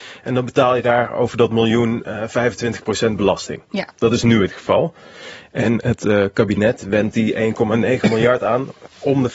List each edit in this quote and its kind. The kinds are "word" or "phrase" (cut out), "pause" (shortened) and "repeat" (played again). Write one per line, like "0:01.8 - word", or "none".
none